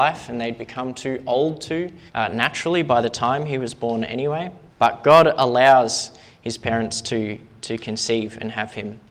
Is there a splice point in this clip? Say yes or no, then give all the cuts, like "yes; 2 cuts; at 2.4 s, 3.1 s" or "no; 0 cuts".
yes; 2 cuts; at 2.1 s, 4.7 s